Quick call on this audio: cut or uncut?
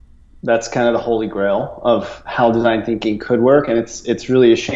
uncut